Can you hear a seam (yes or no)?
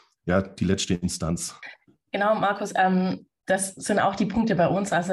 no